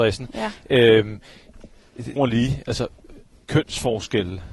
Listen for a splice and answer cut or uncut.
cut